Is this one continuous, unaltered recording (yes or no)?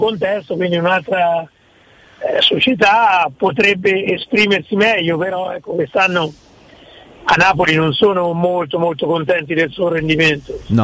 yes